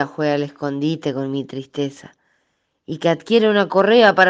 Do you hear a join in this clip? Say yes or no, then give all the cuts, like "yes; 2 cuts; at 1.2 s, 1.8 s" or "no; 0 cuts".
no; 0 cuts